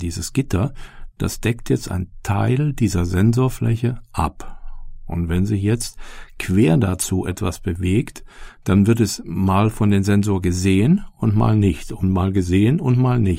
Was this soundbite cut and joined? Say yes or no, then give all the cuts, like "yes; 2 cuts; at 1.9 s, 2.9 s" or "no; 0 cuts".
no; 0 cuts